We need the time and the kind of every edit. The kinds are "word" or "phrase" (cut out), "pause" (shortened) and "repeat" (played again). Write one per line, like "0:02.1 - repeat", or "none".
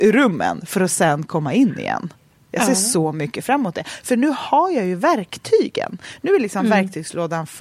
none